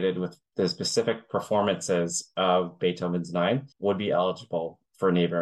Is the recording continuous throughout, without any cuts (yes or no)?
no